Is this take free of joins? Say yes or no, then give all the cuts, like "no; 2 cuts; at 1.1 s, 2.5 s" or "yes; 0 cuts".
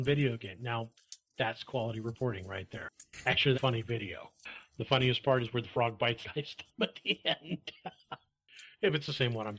no; 1 cut; at 3.5 s